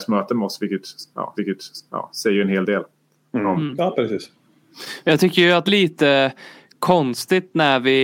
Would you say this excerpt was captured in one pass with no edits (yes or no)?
no